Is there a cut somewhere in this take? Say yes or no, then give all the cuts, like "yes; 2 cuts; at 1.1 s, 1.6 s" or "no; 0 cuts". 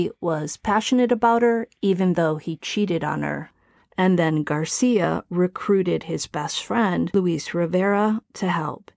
no; 0 cuts